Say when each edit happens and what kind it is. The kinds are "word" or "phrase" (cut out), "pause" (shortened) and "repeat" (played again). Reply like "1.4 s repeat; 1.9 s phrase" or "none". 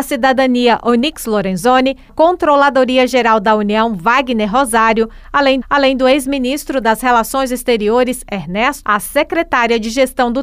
2.1 s word; 5.6 s repeat; 8.8 s word